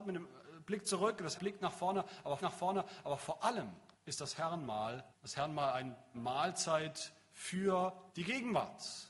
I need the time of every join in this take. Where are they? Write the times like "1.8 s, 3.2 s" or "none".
1.4 s, 2.4 s, 3.9 s, 5.1 s, 6.1 s, 8.1 s